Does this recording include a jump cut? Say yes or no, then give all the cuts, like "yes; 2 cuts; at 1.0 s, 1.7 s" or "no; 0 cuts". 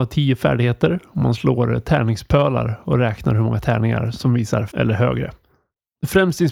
yes; 1 cut; at 4.7 s